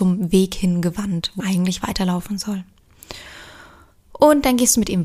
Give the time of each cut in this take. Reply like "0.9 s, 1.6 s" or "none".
1.4 s

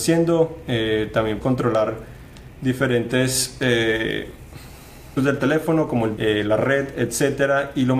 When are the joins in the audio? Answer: 1.4 s, 5.2 s, 6.2 s

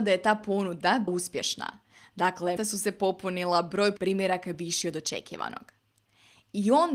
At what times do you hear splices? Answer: 1.1 s, 2.6 s, 4.0 s, 4.5 s

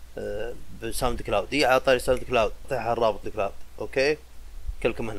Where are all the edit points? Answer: 2.6 s, 3.2 s

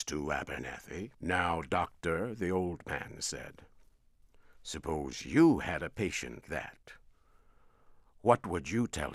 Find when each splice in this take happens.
1.1 s, 6.4 s

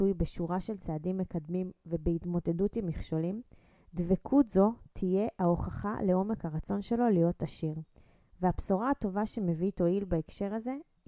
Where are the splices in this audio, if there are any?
none

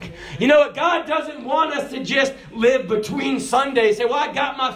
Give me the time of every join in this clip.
none

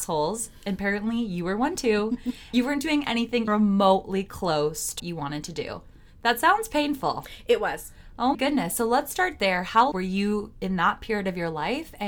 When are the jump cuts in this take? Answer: 2.5 s, 3.5 s, 5.0 s, 8.3 s, 9.9 s

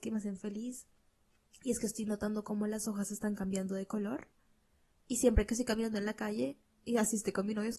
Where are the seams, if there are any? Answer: none

